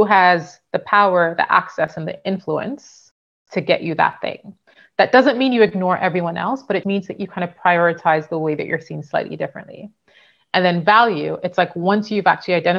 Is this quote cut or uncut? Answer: cut